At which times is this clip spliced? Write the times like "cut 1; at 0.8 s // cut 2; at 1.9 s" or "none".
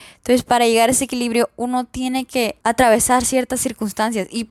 cut 1; at 2.6 s

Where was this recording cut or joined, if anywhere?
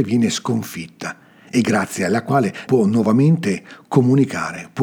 cut 1; at 2.7 s

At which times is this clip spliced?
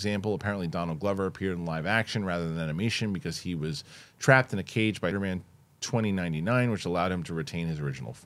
cut 1; at 5.1 s

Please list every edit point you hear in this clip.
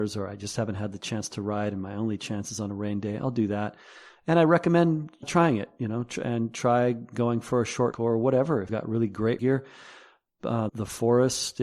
cut 1; at 5.2 s // cut 2; at 7.9 s // cut 3; at 8.7 s // cut 4; at 9.4 s // cut 5; at 10.7 s

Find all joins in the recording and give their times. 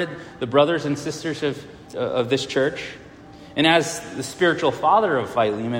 cut 1; at 1.9 s

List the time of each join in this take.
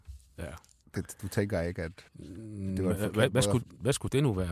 cut 1; at 2.1 s

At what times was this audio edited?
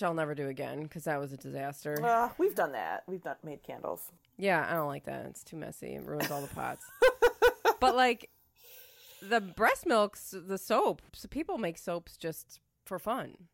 cut 1; at 4.2 s // cut 2; at 11.1 s

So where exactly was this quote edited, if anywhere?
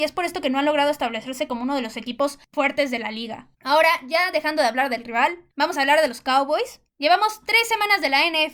cut 1; at 3.5 s // cut 2; at 5.5 s // cut 3; at 6.9 s

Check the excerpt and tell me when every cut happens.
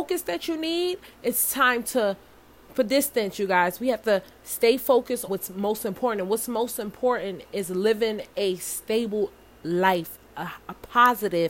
cut 1; at 2.7 s // cut 2; at 5.3 s // cut 3; at 8.3 s

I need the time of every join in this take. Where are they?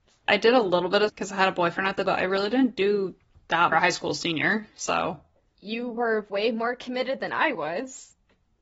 cut 1; at 1.1 s // cut 2; at 2.0 s // cut 3; at 3.7 s // cut 4; at 5.4 s

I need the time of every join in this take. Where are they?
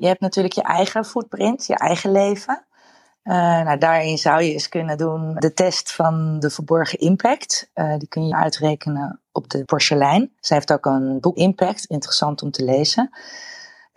cut 1; at 5.4 s // cut 2; at 8.3 s // cut 3; at 9.7 s // cut 4; at 10.4 s // cut 5; at 11.3 s

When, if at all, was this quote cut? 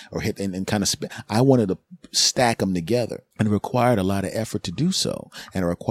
cut 1; at 3.3 s

